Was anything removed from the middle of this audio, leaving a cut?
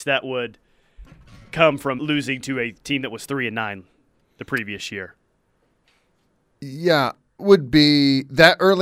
yes; 2 cuts; at 2.0 s, 7.4 s

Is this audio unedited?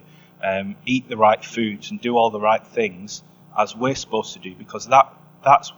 yes; 0 cuts

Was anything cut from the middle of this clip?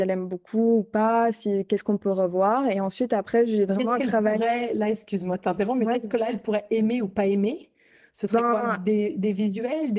no; 0 cuts

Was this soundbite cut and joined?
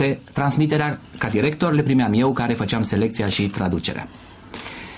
no; 0 cuts

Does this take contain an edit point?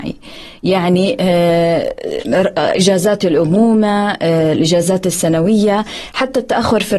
no; 0 cuts

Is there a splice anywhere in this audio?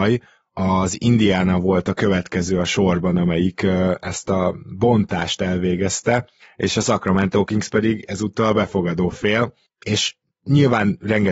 no; 0 cuts

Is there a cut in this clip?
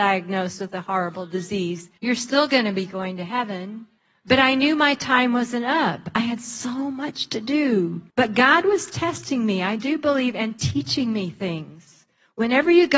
yes; 3 cuts; at 2.0 s, 4.0 s, 8.1 s

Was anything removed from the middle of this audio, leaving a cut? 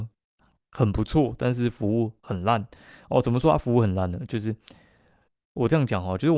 no; 0 cuts

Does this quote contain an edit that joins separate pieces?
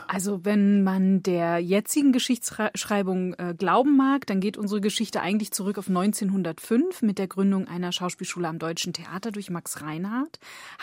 no; 0 cuts

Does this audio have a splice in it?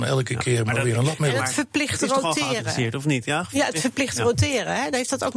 no; 0 cuts

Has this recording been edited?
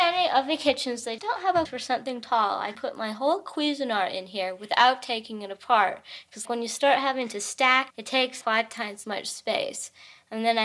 yes; 7 cuts; at 1.2 s, 1.7 s, 2.8 s, 6.5 s, 7.9 s, 8.4 s, 9.0 s

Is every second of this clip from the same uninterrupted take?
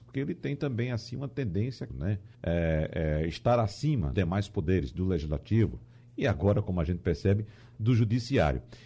no; 3 cuts; at 1.9 s, 2.3 s, 4.1 s

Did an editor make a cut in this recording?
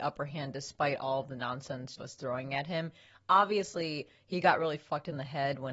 yes; 1 cut; at 2.0 s

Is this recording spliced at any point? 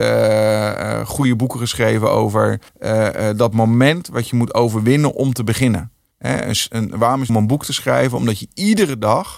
yes; 3 cuts; at 2.7 s, 6.1 s, 7.3 s

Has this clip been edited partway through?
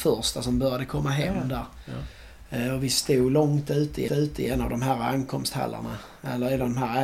yes; 1 cut; at 4.1 s

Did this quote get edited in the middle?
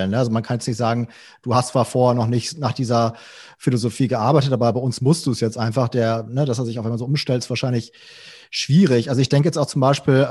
no; 0 cuts

